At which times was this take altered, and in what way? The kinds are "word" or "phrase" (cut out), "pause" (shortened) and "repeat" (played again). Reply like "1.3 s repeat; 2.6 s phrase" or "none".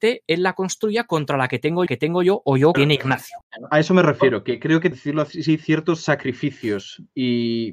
1.9 s repeat; 2.7 s phrase; 4.9 s phrase